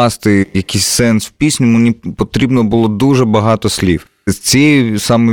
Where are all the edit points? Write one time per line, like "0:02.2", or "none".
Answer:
none